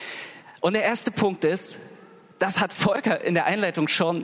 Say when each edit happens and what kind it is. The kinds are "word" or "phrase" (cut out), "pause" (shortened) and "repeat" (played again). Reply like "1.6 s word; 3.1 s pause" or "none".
none